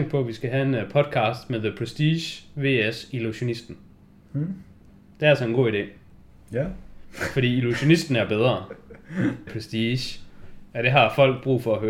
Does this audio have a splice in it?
yes; 1 cut; at 9.5 s

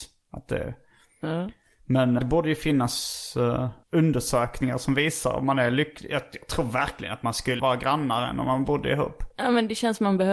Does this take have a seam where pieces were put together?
yes; 3 cuts; at 2.2 s, 3.8 s, 7.6 s

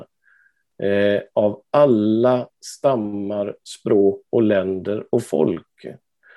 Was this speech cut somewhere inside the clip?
yes; 1 cut; at 4.3 s

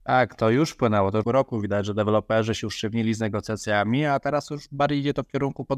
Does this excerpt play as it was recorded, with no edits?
no; 1 cut; at 1.2 s

